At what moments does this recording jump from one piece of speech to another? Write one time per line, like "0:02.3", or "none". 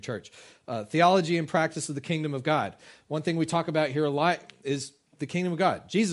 none